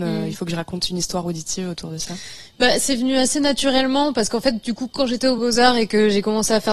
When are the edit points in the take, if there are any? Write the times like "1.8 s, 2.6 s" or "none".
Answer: none

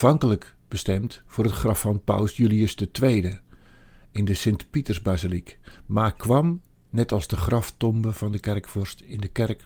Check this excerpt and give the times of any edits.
none

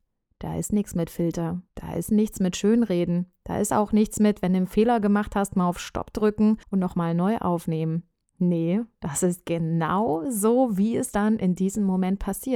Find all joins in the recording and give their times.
1.7 s, 6.6 s

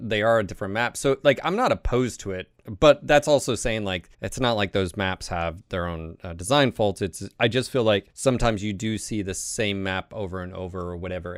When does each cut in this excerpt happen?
4.1 s, 8.1 s

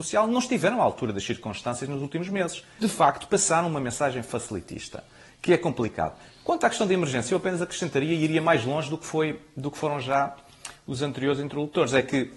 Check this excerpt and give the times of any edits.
2.8 s

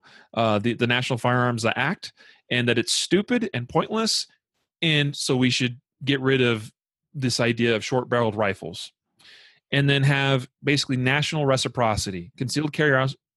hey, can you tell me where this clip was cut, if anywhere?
none

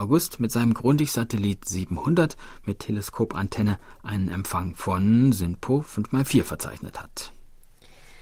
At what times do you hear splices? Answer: none

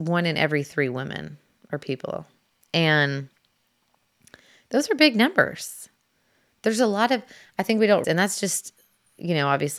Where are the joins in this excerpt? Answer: 8.0 s

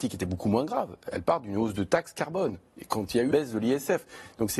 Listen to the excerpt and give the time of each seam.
3.3 s

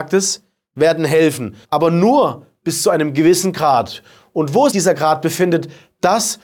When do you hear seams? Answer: 1.6 s, 4.7 s

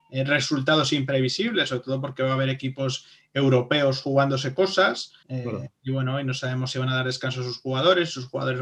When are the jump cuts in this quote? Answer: 5.2 s

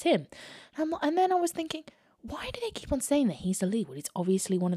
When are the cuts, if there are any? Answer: none

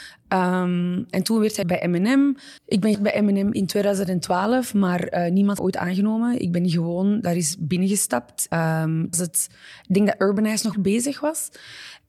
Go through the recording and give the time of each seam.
1.6 s, 2.6 s, 2.9 s, 5.6 s, 8.5 s, 9.1 s, 10.7 s

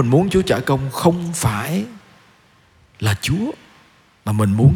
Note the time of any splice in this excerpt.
none

